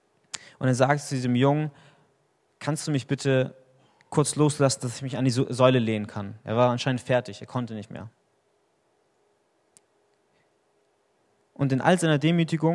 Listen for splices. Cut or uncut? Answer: uncut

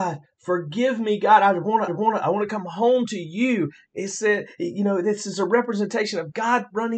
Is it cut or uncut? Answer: cut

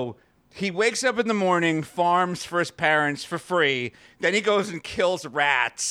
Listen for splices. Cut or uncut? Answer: uncut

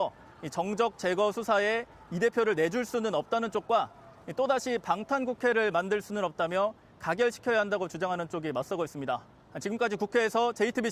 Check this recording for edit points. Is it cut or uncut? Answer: uncut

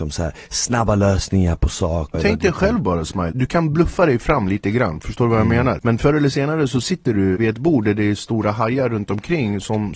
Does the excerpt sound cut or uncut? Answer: cut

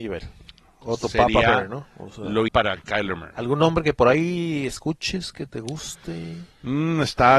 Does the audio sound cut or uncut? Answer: cut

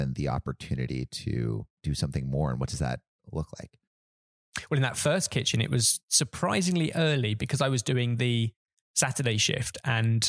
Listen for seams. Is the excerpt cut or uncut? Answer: cut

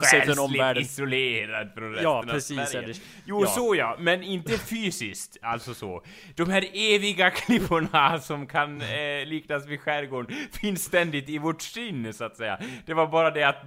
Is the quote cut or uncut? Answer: uncut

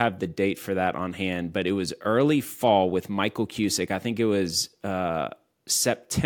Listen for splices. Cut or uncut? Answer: uncut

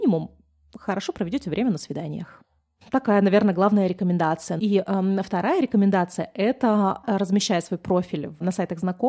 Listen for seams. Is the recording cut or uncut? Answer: uncut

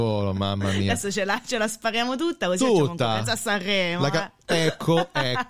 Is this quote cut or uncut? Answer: uncut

